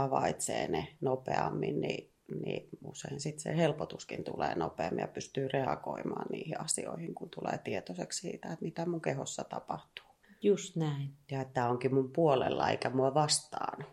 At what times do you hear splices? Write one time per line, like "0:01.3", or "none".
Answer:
0:10.2